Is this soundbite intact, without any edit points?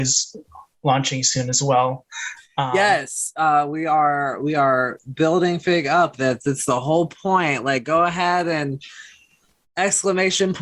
yes; 0 cuts

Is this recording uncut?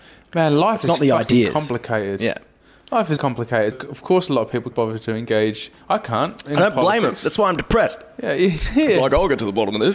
no; 3 cuts; at 3.2 s, 3.7 s, 4.7 s

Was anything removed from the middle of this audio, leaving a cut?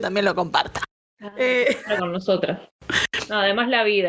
no; 0 cuts

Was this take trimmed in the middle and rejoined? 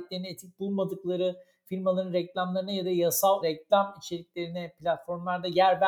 yes; 1 cut; at 3.4 s

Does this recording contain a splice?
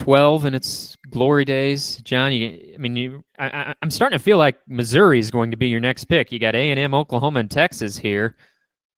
no; 0 cuts

